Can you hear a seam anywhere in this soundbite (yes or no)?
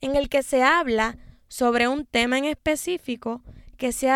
no